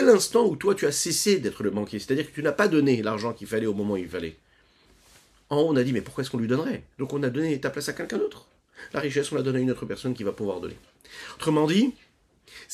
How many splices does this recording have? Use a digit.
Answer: 1